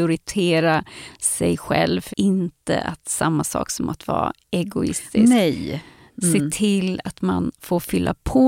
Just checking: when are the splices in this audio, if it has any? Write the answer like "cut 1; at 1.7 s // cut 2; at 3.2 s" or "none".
cut 1; at 2.1 s